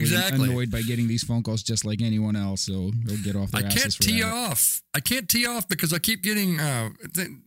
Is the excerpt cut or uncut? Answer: uncut